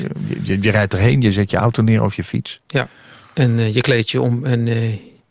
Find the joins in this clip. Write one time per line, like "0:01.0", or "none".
none